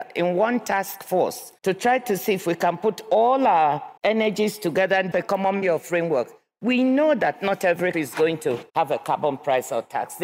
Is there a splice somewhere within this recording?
yes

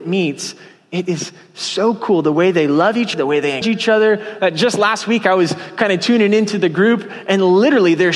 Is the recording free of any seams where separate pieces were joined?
no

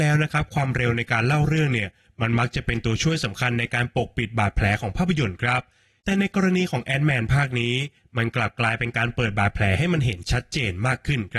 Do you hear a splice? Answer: no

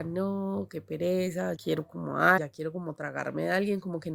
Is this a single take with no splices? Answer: no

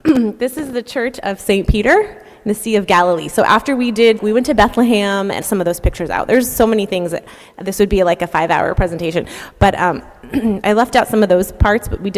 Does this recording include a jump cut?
yes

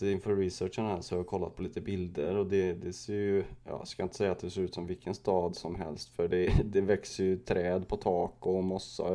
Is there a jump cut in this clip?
no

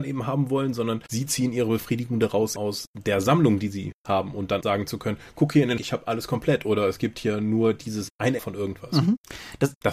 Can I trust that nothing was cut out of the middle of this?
no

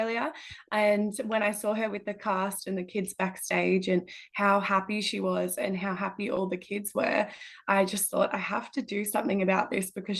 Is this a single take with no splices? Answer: yes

